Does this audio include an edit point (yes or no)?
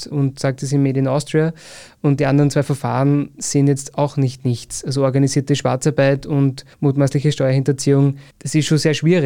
yes